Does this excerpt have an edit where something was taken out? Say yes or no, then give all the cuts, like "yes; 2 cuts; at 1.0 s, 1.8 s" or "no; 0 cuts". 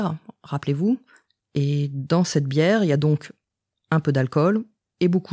no; 0 cuts